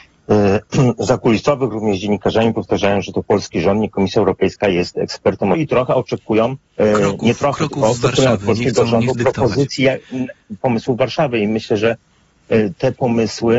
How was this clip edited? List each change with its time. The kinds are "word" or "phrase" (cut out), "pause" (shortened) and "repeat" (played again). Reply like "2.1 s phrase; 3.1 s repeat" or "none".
5.5 s phrase; 6.7 s pause; 9.1 s word; 10.6 s word